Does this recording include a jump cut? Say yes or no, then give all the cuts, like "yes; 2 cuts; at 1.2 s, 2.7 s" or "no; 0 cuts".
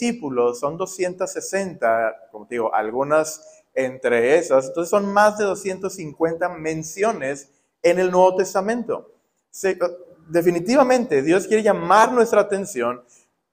no; 0 cuts